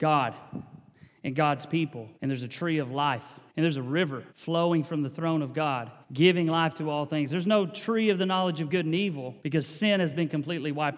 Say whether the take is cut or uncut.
cut